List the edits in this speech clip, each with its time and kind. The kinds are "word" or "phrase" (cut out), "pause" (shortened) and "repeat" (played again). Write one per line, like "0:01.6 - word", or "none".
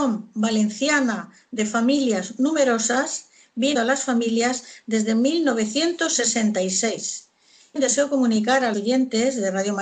0:03.7 - word
0:07.8 - word
0:08.7 - word